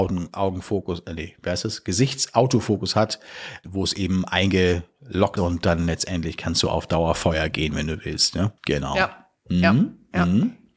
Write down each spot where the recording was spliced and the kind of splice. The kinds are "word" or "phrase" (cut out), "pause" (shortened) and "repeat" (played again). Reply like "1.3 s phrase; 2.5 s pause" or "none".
3.6 s word; 5.4 s word; 8.6 s pause